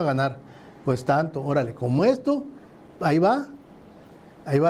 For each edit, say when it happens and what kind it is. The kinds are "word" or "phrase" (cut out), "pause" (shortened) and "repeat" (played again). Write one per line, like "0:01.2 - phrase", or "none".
none